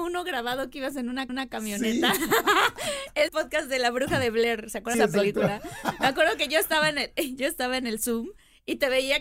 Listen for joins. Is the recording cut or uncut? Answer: cut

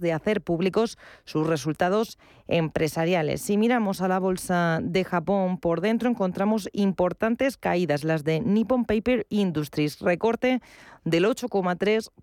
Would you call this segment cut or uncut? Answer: uncut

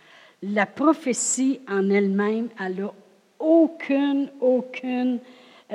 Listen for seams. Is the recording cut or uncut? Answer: uncut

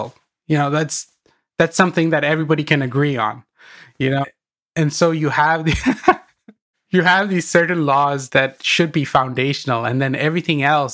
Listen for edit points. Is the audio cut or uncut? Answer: cut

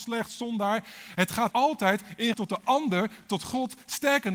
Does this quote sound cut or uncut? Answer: cut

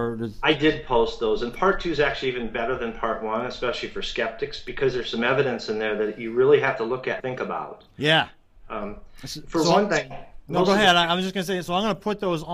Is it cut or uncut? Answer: cut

